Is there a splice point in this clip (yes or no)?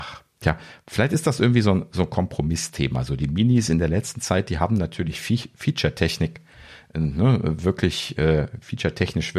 no